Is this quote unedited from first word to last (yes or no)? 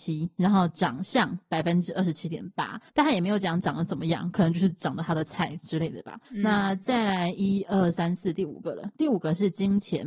no